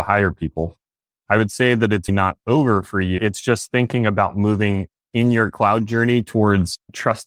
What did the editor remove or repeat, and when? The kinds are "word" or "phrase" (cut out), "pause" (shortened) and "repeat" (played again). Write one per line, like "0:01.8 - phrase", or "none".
0:02.1 - word